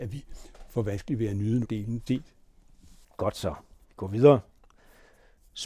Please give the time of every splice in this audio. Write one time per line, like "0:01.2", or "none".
0:01.6
0:02.1
0:03.8